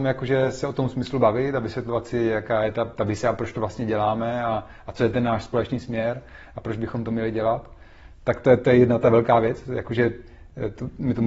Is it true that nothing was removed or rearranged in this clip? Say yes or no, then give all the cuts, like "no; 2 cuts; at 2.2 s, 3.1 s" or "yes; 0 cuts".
yes; 0 cuts